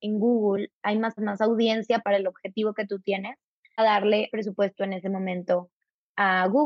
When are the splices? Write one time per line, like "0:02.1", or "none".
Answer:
0:01.2
0:02.0
0:03.8
0:04.3